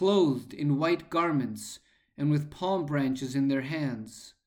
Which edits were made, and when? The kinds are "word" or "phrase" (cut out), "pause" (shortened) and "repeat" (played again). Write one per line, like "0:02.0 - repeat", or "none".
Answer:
none